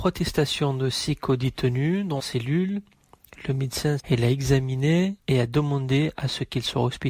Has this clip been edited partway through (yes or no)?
yes